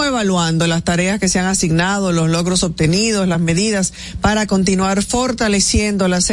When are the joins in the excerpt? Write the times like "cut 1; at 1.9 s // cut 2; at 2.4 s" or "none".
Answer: none